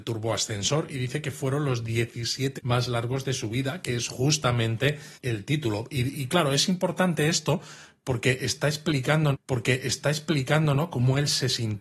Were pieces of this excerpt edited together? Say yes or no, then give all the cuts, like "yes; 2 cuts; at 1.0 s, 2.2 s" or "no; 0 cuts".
yes; 3 cuts; at 2.6 s, 5.1 s, 9.3 s